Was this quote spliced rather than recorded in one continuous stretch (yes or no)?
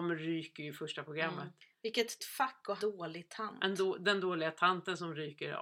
yes